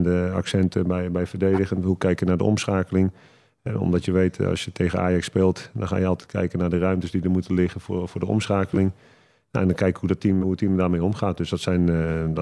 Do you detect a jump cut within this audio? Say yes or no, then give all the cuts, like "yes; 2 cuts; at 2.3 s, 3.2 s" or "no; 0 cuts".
yes; 1 cut; at 10.4 s